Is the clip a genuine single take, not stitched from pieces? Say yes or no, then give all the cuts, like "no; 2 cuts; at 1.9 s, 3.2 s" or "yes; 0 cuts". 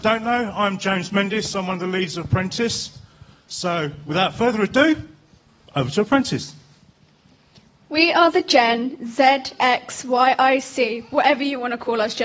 yes; 0 cuts